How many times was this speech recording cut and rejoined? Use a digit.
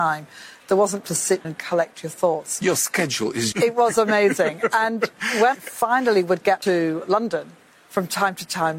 5